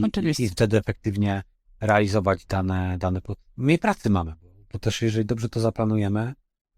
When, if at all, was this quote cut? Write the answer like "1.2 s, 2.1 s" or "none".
none